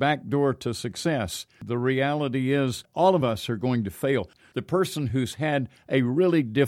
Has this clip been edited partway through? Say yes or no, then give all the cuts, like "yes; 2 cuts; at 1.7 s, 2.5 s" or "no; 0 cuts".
no; 0 cuts